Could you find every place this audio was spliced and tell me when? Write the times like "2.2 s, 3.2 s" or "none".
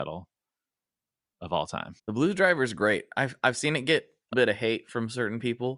2.0 s, 4.3 s